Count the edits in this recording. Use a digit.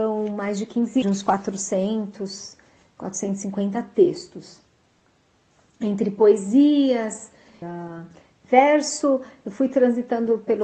2